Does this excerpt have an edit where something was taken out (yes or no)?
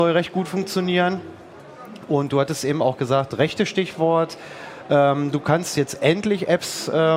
no